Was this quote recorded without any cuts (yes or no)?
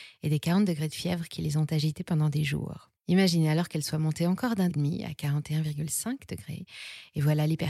no